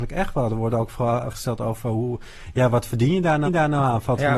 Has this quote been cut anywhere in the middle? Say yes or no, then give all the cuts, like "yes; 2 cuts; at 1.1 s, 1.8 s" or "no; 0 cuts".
yes; 2 cuts; at 1.3 s, 3.5 s